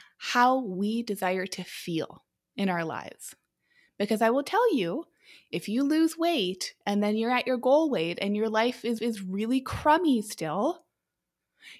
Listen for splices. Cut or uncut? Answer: cut